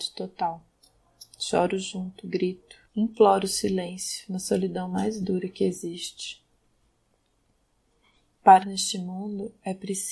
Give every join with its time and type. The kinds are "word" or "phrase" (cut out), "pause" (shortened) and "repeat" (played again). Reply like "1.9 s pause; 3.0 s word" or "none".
2.9 s pause; 8.6 s word